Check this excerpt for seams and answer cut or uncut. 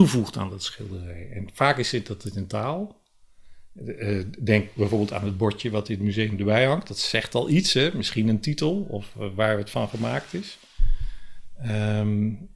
uncut